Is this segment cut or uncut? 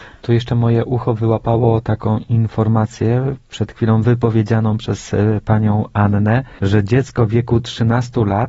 uncut